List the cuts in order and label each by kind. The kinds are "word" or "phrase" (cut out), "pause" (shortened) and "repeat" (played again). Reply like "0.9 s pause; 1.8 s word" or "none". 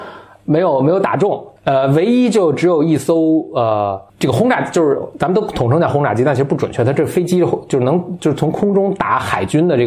1.6 s pause; 4.1 s pause

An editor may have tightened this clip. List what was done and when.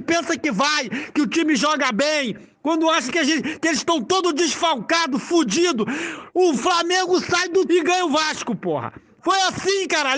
6.3 s word; 7.7 s word

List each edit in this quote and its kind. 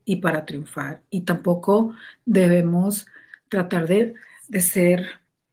none

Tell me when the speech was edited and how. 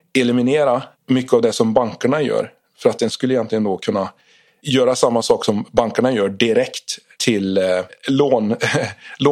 1.0 s pause; 3.1 s word

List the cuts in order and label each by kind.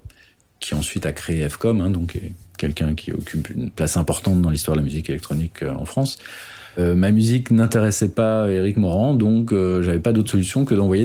none

